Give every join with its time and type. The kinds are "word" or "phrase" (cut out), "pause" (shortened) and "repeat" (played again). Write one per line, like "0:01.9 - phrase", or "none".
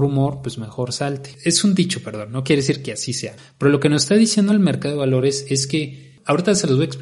none